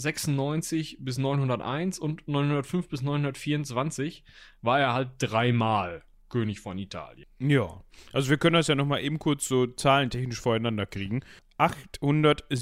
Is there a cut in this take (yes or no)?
no